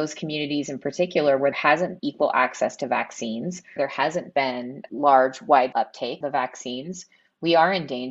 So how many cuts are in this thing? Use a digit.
6